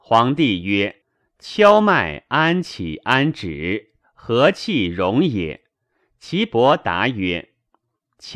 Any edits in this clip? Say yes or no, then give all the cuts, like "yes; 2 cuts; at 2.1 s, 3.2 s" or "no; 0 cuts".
yes; 2 cuts; at 1.0 s, 5.7 s